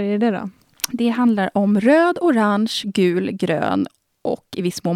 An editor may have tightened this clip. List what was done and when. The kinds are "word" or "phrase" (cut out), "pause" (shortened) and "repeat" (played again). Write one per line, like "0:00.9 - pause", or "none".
none

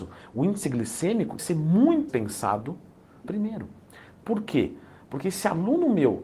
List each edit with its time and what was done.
0:01.4 - word
0:02.1 - word
0:03.2 - phrase

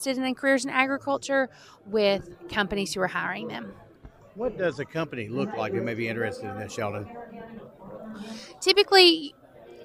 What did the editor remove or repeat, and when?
none

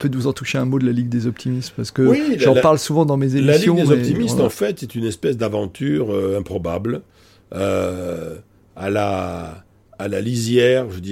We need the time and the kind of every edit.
none

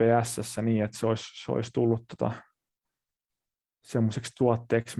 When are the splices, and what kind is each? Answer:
none

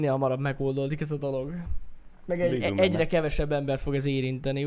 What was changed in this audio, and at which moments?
none

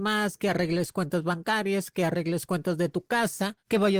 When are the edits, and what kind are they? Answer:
none

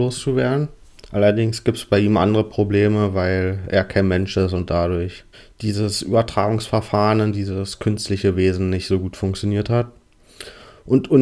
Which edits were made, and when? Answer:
0:01.0 - pause
0:05.3 - pause

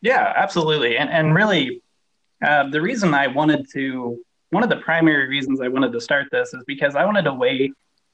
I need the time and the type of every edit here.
none

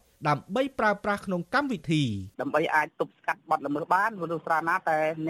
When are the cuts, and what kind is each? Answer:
0:02.3 - pause

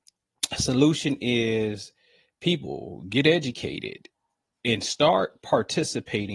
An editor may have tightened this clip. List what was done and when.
none

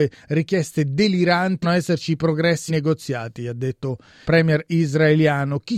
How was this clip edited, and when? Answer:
0:01.6 - word
0:02.7 - word
0:04.2 - word

